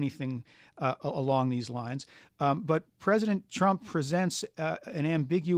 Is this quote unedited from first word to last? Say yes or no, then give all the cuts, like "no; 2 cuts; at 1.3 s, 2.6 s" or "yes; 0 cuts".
yes; 0 cuts